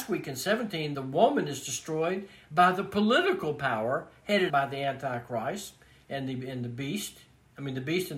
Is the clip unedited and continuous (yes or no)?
no